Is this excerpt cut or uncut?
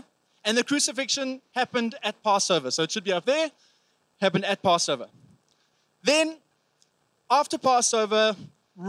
uncut